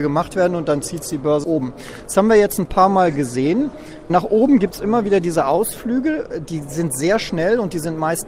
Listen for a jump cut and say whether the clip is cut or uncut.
cut